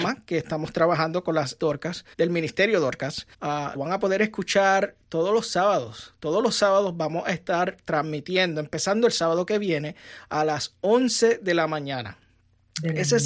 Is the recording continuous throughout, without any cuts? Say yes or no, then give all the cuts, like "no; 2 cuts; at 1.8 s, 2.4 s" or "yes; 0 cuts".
no; 4 cuts; at 1.6 s, 2.1 s, 3.3 s, 3.7 s